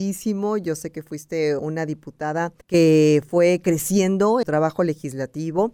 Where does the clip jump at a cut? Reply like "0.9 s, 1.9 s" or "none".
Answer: 1.6 s, 2.6 s, 4.4 s